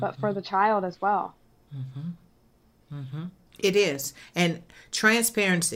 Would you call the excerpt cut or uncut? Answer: uncut